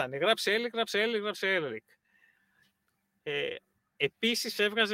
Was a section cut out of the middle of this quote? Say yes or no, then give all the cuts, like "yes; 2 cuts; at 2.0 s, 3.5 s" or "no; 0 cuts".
no; 0 cuts